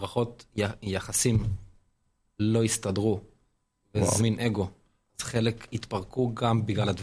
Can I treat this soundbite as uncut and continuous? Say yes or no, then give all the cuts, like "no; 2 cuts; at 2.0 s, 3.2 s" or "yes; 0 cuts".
no; 1 cut; at 4.2 s